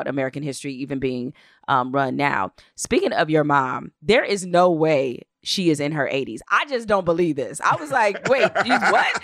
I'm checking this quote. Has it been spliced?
yes; 1 cut; at 4.0 s

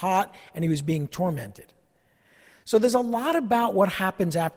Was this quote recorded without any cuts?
yes; 0 cuts

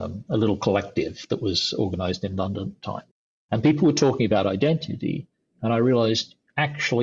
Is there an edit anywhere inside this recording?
no; 0 cuts

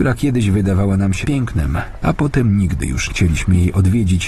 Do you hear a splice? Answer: yes; 2 cuts; at 1.2 s, 3.1 s

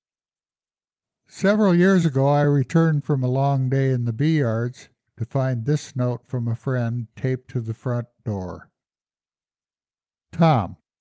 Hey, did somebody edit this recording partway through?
no; 0 cuts

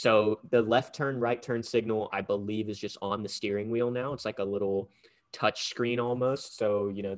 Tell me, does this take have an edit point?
no; 0 cuts

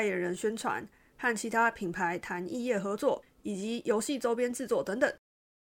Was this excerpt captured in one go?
yes; 0 cuts

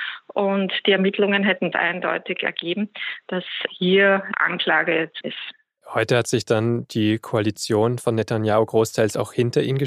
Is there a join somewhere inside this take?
yes; 3 cuts; at 1.7 s, 3.7 s, 5.2 s

